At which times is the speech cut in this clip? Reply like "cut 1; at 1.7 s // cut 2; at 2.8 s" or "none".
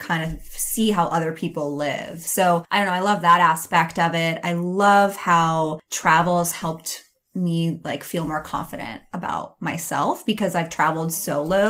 none